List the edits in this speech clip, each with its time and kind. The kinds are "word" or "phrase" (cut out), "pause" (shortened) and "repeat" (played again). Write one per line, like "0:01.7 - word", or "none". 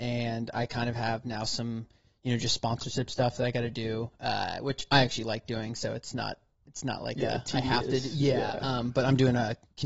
none